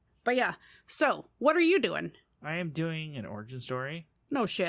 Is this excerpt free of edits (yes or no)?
yes